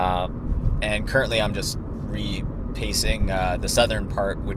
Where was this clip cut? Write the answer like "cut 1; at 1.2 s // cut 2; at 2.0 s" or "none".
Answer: none